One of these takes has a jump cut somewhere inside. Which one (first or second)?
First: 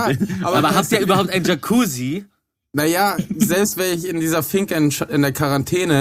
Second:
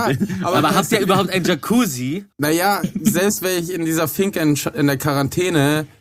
second